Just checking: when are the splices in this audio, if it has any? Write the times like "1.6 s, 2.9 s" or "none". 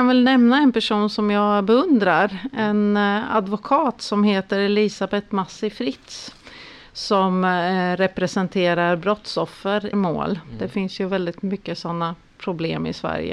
9.9 s